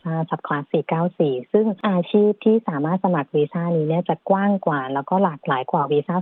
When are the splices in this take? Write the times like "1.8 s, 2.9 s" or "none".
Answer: 1.8 s